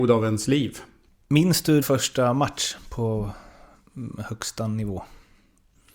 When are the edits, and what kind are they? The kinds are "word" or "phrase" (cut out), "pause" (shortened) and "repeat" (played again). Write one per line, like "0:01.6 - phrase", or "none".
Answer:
0:01.8 - word